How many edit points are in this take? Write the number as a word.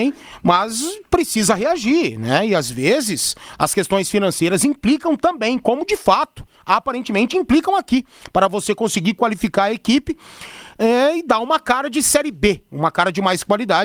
zero